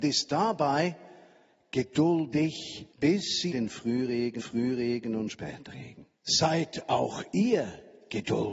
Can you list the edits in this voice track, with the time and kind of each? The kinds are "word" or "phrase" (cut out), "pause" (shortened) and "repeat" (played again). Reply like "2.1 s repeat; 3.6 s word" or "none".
2.9 s pause; 3.5 s word; 4.4 s repeat; 6.2 s pause